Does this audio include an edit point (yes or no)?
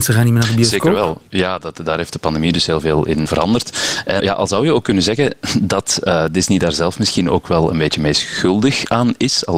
yes